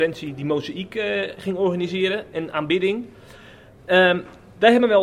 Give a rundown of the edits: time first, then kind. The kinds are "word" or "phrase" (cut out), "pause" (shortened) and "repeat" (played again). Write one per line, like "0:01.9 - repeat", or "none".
none